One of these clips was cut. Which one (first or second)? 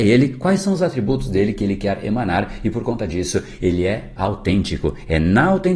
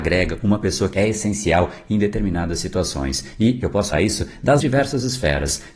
second